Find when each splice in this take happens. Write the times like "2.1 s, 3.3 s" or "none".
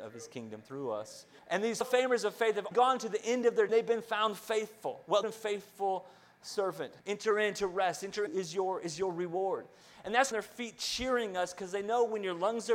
1.4 s, 1.8 s, 2.7 s, 3.7 s, 5.2 s, 7.0 s, 8.3 s, 10.3 s

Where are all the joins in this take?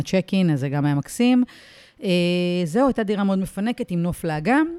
none

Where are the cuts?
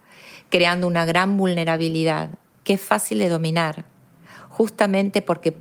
2.5 s

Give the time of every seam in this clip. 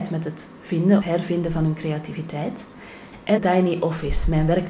1.0 s, 3.4 s

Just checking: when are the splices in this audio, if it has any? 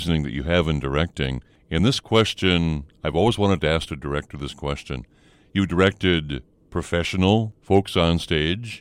none

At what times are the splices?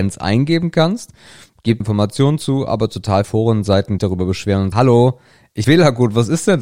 1.8 s, 3.2 s, 4.0 s, 4.7 s, 5.6 s

